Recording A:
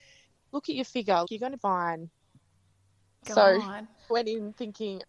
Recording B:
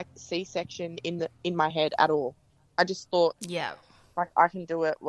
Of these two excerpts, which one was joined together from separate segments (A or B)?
A